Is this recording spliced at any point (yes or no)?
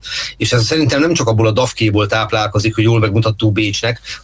no